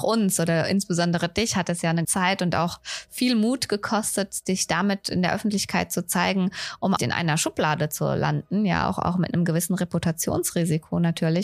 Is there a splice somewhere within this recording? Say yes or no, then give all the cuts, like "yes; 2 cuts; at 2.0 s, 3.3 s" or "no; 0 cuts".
yes; 2 cuts; at 2.0 s, 7.0 s